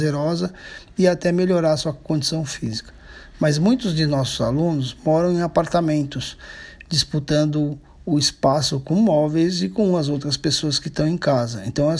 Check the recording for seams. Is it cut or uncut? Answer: uncut